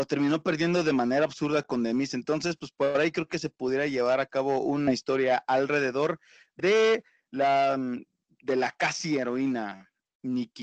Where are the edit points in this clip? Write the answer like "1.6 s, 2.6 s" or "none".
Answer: none